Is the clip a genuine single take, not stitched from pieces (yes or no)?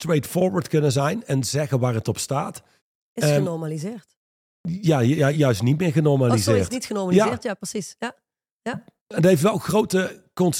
yes